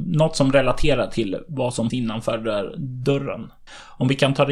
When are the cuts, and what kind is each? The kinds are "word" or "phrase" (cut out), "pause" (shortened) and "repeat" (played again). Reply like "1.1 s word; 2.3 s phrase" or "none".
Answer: 1.9 s word

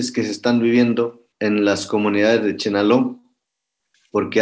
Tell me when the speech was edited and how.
1.3 s pause

